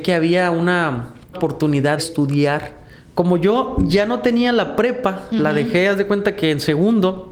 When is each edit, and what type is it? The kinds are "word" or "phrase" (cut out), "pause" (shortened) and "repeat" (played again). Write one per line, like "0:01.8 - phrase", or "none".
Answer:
0:01.3 - word
0:02.0 - word